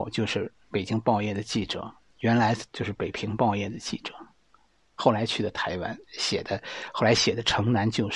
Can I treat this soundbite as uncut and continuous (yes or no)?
yes